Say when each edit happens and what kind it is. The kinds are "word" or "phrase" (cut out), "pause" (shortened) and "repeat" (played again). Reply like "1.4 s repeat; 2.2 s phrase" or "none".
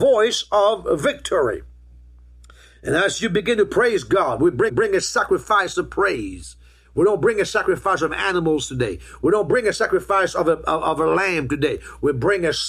4.7 s repeat